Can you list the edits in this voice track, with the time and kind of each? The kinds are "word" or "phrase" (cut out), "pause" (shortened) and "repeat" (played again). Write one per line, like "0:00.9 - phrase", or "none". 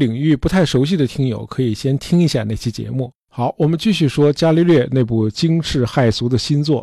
0:03.2 - pause